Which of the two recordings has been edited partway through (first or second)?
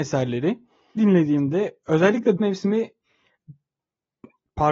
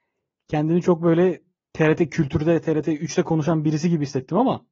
first